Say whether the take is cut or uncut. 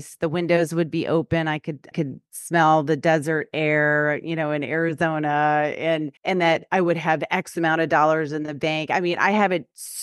cut